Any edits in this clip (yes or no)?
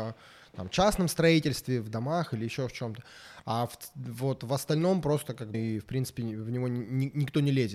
yes